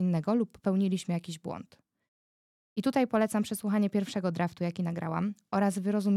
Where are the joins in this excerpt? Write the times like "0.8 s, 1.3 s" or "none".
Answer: none